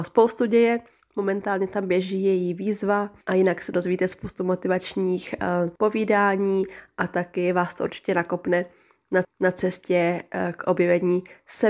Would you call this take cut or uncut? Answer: cut